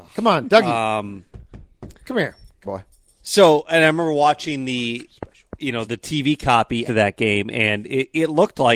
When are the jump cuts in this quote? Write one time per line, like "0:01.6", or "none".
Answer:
0:02.6
0:05.8
0:06.9